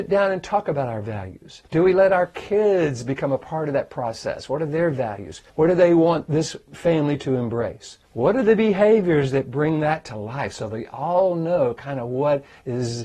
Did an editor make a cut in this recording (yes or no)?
yes